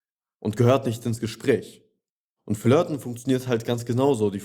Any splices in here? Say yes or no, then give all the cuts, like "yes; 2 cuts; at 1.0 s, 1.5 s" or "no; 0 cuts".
no; 0 cuts